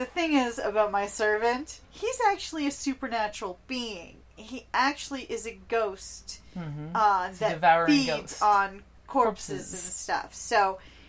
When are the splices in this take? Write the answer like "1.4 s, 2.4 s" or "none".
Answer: 1.8 s